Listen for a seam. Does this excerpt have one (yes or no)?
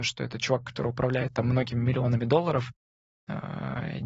no